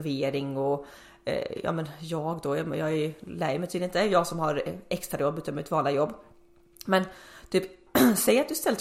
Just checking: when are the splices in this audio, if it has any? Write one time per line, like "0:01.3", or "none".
none